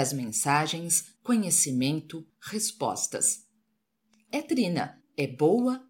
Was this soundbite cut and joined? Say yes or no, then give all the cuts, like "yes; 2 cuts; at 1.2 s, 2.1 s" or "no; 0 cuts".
yes; 2 cuts; at 1.2 s, 4.3 s